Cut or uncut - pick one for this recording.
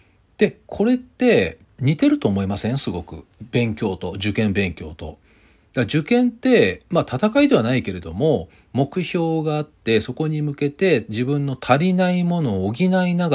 cut